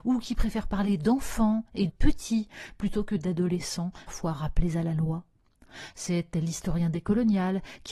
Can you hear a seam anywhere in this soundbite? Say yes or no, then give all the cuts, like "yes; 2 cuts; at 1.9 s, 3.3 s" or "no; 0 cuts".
yes; 2 cuts; at 1.9 s, 4.1 s